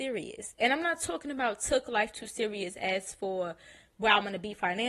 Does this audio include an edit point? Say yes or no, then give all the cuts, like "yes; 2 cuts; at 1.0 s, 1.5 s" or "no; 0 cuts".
no; 0 cuts